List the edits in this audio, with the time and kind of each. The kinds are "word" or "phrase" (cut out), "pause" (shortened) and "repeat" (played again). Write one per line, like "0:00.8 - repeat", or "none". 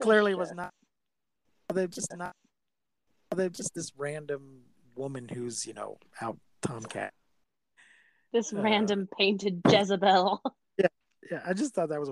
0:02.1 - repeat